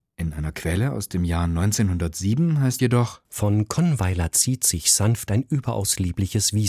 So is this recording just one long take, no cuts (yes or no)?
no